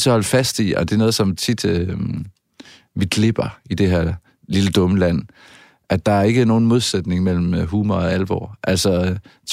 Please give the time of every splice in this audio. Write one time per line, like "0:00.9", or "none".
none